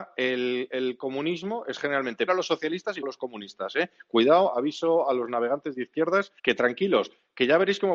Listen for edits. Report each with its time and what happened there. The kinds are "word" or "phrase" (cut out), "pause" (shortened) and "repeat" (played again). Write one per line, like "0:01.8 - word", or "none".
0:02.3 - word
0:03.0 - word
0:06.4 - pause